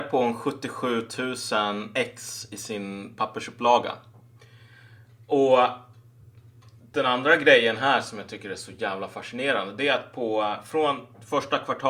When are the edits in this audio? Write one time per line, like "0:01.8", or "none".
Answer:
none